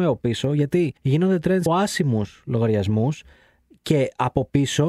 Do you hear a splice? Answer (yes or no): yes